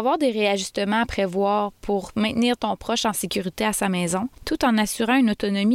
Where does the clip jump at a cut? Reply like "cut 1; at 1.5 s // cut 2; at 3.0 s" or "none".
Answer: cut 1; at 4.4 s